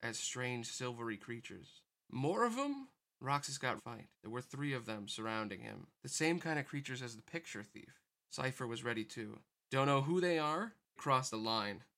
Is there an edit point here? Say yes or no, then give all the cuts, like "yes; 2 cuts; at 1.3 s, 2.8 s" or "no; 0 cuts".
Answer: yes; 4 cuts; at 3.8 s, 4.1 s, 6.0 s, 11.0 s